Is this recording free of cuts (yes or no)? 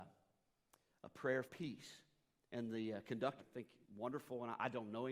no